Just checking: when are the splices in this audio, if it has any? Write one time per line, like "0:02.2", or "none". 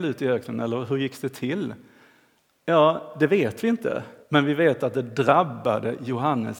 0:04.2

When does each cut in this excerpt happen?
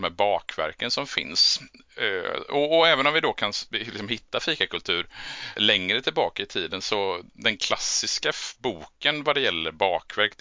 0:05.6

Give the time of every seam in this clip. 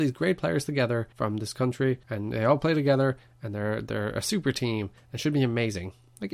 0:01.1
0:02.0

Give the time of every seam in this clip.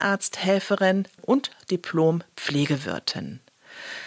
0:01.2

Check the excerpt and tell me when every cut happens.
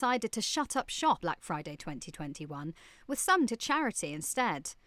0:01.2
0:03.5

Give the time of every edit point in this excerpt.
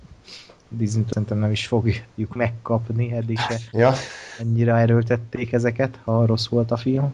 0:01.1

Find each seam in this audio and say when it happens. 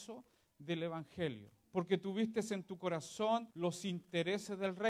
0:01.6
0:03.5

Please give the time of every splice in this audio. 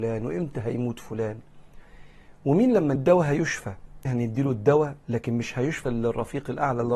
0:03.0
0:04.1
0:05.9

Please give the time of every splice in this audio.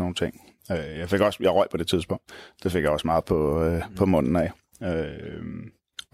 none

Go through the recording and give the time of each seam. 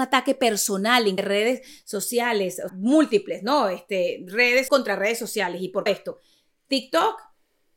0:01.2
0:02.7
0:04.7
0:05.9

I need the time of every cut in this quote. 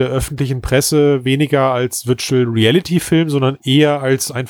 none

